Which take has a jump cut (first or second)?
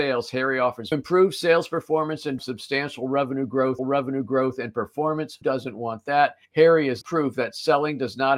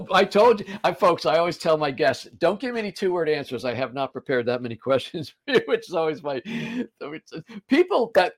first